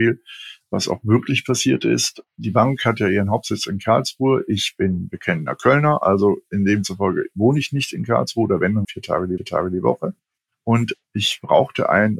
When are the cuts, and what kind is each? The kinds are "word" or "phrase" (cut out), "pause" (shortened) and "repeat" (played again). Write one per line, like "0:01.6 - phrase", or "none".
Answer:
0:02.3 - pause
0:08.8 - word
0:09.4 - repeat
0:11.0 - pause